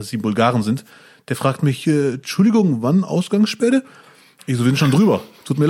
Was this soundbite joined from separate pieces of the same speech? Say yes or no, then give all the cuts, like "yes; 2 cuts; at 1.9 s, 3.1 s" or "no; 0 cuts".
no; 0 cuts